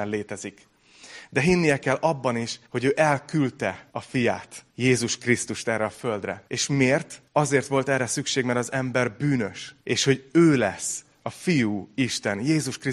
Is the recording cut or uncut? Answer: cut